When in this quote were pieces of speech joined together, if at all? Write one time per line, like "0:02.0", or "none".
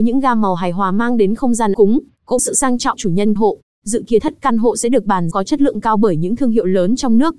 0:01.7
0:02.4
0:03.0
0:03.4
0:04.2
0:05.3